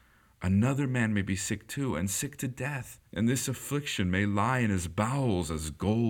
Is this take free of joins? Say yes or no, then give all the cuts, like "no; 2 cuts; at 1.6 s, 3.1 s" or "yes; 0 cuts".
no; 1 cut; at 3.1 s